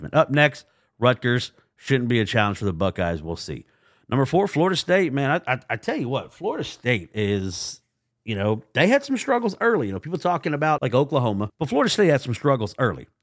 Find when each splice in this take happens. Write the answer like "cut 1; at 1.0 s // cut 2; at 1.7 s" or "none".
none